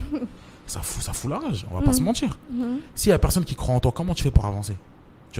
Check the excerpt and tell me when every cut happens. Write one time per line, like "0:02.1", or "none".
none